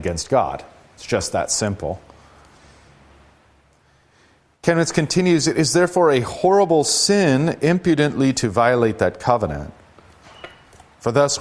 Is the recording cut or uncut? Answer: uncut